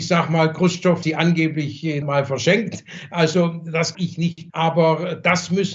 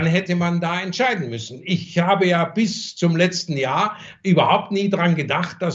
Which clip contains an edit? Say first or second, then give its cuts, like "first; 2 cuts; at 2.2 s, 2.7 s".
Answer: first; 4 cuts; at 1.0 s, 2.0 s, 3.9 s, 4.5 s